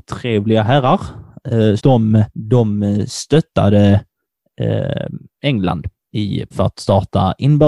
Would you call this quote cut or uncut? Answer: cut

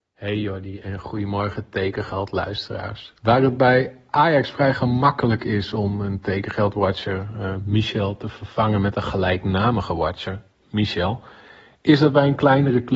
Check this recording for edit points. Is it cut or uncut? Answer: cut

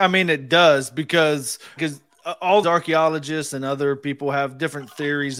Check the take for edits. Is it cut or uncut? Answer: cut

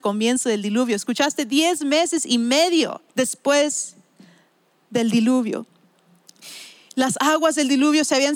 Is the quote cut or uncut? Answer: cut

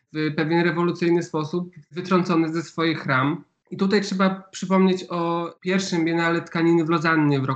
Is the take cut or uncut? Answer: uncut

